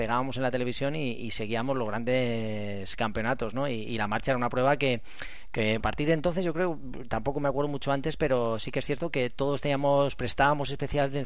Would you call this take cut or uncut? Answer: cut